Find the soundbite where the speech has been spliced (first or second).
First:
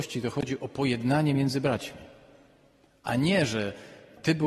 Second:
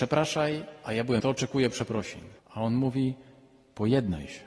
second